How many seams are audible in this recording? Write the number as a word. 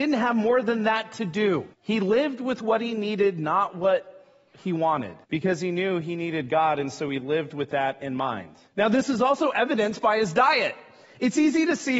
three